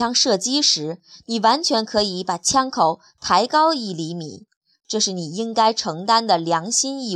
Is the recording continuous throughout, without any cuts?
yes; 0 cuts

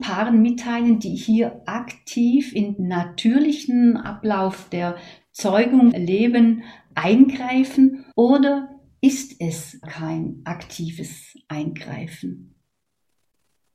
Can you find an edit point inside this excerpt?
yes; 4 cuts; at 2.8 s, 5.9 s, 8.1 s, 9.8 s

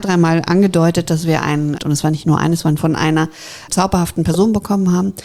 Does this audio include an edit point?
yes; 3 cuts; at 1.8 s, 2.8 s, 3.7 s

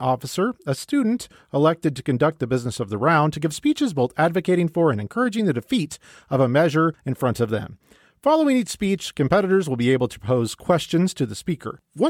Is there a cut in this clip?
no; 0 cuts

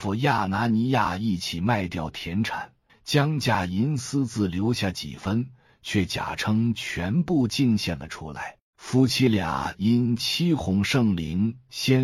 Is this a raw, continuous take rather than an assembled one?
no; 2 cuts; at 2.9 s, 8.6 s

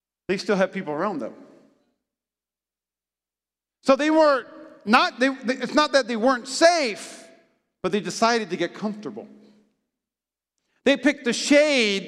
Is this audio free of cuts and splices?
yes; 0 cuts

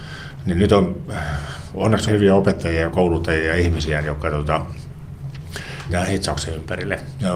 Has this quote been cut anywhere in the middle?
yes; 2 cuts; at 2.1 s, 5.9 s

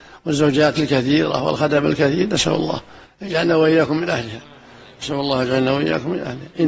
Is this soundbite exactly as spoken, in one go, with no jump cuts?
yes; 0 cuts

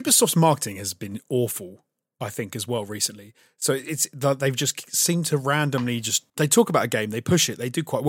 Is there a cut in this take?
yes; 1 cut; at 6.3 s

